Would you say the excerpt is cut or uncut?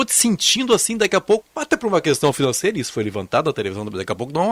cut